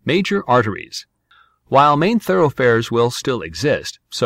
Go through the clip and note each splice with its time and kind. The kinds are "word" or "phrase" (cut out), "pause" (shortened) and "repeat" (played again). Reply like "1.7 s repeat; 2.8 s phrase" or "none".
none